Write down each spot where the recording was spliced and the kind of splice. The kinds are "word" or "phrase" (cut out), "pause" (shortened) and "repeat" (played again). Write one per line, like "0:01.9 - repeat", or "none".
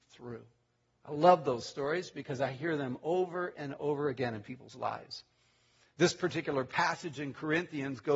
none